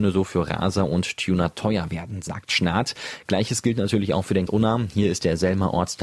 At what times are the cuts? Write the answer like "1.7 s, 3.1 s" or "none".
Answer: 4.5 s